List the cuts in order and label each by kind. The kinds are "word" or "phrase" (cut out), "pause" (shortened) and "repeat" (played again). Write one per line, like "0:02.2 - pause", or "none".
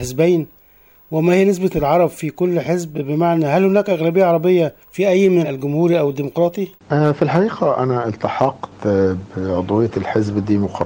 0:01.7 - word
0:04.8 - pause
0:05.4 - word
0:06.8 - pause